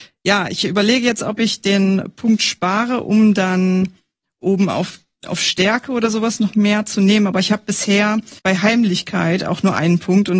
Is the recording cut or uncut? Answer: cut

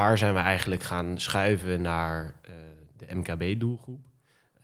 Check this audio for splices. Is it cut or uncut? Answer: uncut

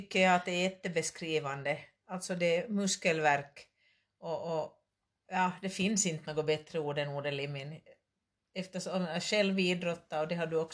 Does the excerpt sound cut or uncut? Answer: uncut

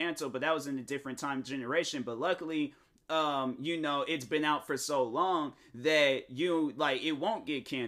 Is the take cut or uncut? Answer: uncut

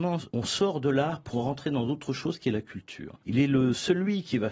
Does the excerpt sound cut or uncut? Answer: cut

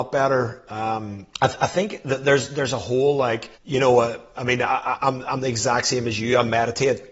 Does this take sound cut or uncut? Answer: cut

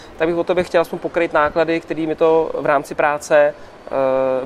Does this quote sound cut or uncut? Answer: uncut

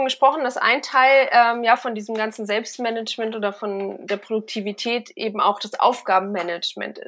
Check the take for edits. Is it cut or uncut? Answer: uncut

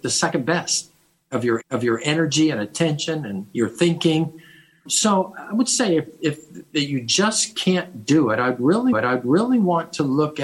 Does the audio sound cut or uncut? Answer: cut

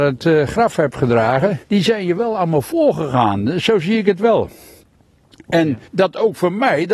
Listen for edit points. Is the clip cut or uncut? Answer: cut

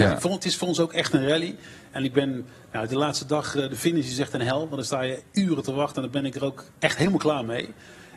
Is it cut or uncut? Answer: uncut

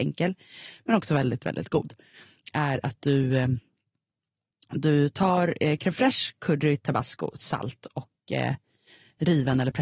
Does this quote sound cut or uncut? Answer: uncut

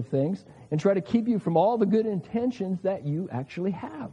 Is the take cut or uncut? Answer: uncut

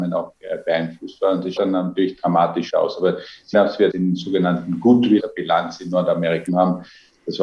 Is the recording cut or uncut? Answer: cut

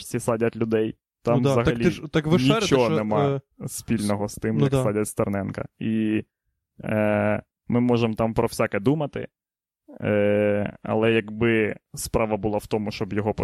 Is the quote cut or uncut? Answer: uncut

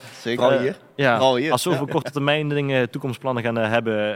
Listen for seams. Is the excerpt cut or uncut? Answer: uncut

